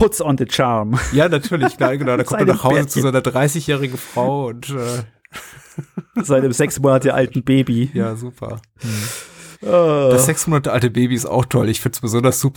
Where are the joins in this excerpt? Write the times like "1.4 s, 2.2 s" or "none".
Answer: 9.5 s